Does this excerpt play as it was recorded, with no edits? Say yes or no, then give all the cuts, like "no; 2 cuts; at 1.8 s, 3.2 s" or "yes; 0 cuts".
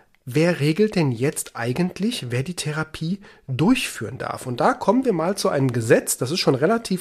yes; 0 cuts